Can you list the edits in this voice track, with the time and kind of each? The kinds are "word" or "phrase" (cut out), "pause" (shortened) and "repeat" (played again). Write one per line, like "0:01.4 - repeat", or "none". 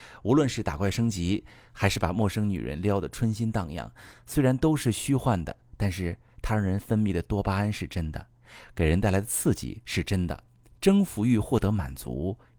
none